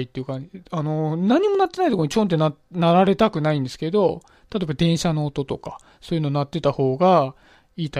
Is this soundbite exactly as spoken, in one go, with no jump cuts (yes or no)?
yes